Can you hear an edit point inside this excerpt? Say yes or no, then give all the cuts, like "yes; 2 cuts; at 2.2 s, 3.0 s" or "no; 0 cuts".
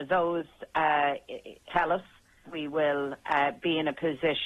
yes; 2 cuts; at 1.7 s, 2.5 s